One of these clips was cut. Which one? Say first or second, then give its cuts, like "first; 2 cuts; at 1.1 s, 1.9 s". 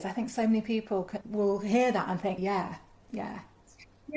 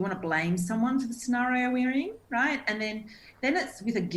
first; 2 cuts; at 1.2 s, 2.4 s